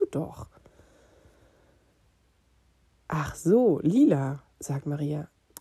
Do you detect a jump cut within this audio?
yes; 1 cut; at 4.5 s

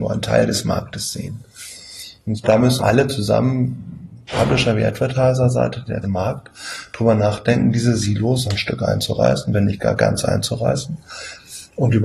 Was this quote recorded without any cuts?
no; 4 cuts; at 2.4 s, 2.8 s, 6.0 s, 8.4 s

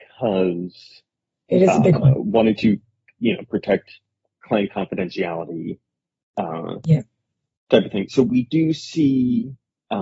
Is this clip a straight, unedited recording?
yes; 0 cuts

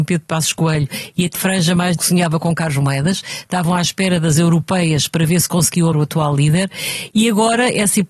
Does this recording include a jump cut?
yes; 3 cuts; at 1.4 s, 2.0 s, 5.9 s

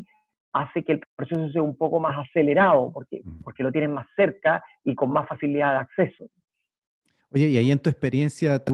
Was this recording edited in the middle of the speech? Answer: no; 0 cuts

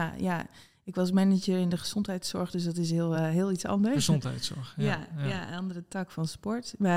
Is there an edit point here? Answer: no; 0 cuts

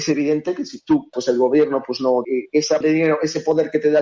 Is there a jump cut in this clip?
yes; 3 cuts; at 1.1 s, 2.2 s, 2.8 s

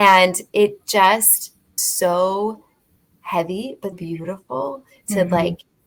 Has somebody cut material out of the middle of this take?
yes; 2 cuts; at 1.8 s, 3.9 s

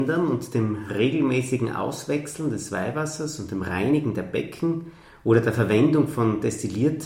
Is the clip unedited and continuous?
yes; 0 cuts

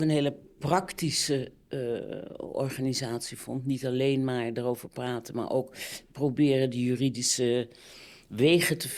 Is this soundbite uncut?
yes; 0 cuts

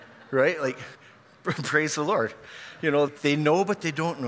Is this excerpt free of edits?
no; 2 cuts; at 0.9 s, 3.1 s

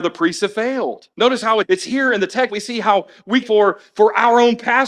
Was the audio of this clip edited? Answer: yes; 4 cuts; at 1.1 s, 1.6 s, 2.5 s, 3.4 s

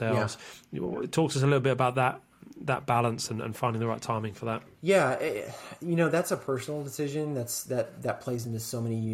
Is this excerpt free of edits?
yes; 0 cuts

